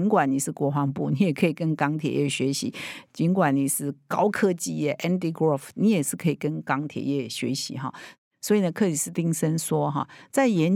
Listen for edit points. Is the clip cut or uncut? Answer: uncut